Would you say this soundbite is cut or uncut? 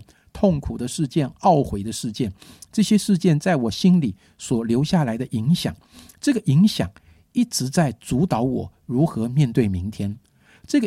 uncut